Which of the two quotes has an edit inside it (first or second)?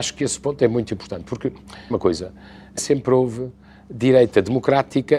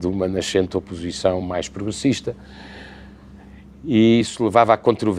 first